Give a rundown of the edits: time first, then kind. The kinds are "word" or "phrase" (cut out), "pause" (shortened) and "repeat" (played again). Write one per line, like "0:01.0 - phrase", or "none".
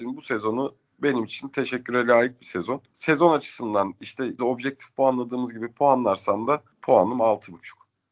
0:02.9 - pause
0:04.4 - word
0:06.7 - pause